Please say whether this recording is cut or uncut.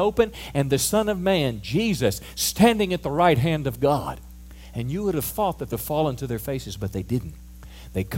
cut